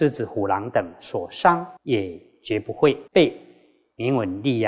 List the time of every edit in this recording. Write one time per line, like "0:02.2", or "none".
0:01.8
0:03.1